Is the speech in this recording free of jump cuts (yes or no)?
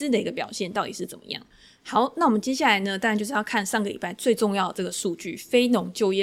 yes